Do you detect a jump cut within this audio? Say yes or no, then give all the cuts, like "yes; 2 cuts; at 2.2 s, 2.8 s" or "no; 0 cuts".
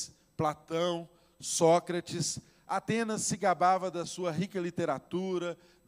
no; 0 cuts